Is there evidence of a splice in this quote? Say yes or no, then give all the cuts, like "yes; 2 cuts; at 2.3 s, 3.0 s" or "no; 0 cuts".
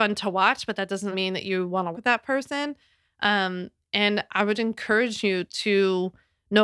yes; 3 cuts; at 1.1 s, 1.9 s, 4.5 s